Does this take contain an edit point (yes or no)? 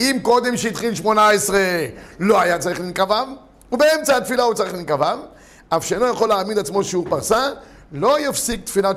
no